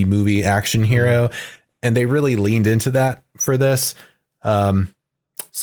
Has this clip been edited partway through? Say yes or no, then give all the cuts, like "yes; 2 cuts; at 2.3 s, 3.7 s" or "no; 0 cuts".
no; 0 cuts